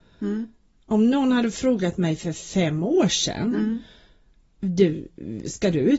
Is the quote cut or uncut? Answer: uncut